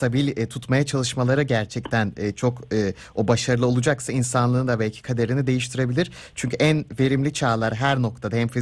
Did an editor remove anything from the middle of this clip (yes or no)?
no